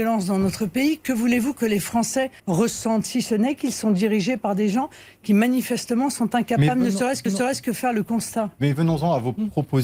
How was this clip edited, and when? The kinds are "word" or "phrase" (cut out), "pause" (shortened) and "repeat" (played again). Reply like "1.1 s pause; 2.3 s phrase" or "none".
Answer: 2.4 s pause; 7.3 s repeat